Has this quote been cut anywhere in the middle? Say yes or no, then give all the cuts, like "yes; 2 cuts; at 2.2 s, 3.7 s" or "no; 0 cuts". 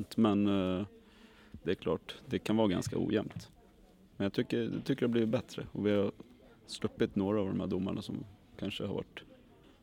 no; 0 cuts